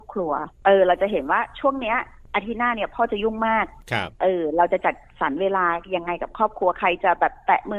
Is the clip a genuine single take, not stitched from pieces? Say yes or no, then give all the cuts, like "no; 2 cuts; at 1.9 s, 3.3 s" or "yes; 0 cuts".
no; 1 cut; at 4.1 s